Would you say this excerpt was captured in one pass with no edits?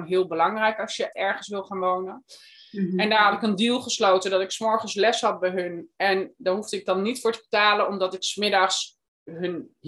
no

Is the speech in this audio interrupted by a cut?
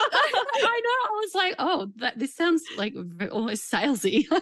no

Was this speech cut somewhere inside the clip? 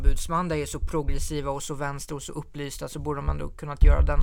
no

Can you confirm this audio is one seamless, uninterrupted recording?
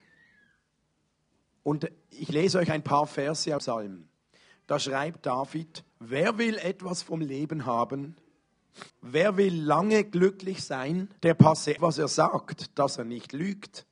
no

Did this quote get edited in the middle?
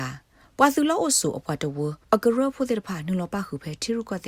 yes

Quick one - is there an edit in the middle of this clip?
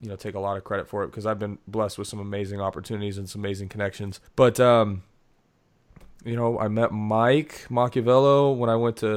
yes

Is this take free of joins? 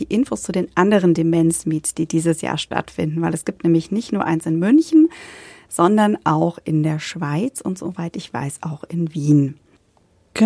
yes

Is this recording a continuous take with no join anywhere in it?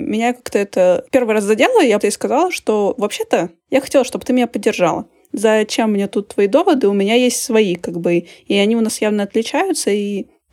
no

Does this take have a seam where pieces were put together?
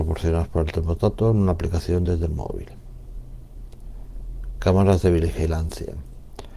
no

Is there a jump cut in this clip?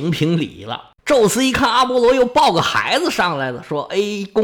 yes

